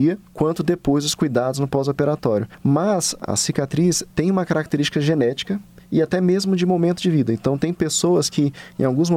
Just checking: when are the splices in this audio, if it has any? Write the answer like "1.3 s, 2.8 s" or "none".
none